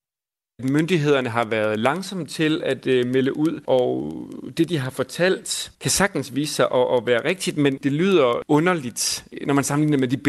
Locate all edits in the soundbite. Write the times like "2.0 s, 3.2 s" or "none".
none